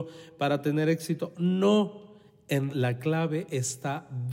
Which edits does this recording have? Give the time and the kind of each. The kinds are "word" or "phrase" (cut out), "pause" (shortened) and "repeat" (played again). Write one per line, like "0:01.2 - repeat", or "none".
0:02.7 - word